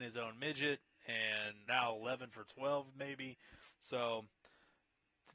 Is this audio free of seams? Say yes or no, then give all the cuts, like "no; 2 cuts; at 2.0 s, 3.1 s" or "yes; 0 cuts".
no; 1 cut; at 1.7 s